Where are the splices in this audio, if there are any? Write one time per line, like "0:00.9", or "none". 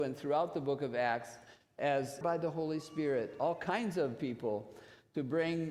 0:02.2